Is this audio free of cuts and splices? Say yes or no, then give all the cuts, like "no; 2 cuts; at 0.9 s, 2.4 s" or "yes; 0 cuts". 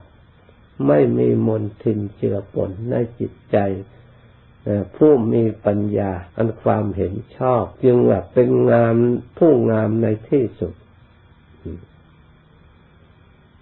no; 2 cuts; at 6.3 s, 7.7 s